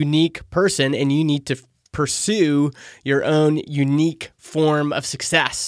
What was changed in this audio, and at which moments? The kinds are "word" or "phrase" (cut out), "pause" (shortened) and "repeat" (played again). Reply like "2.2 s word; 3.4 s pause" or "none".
none